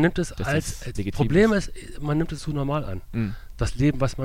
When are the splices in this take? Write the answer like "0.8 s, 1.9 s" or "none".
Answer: 0.9 s, 2.4 s